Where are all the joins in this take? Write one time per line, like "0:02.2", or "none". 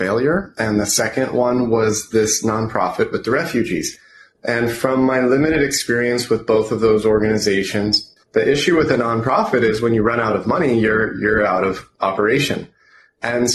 0:08.2